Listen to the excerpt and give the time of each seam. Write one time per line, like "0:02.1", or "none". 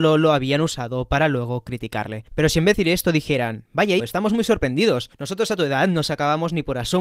0:02.7
0:04.0